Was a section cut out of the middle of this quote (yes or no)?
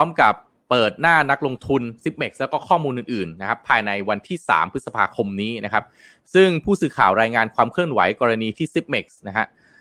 no